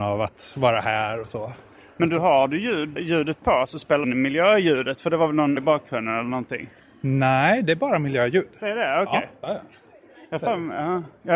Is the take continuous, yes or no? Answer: no